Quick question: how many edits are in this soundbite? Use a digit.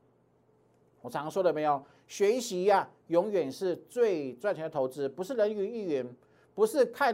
0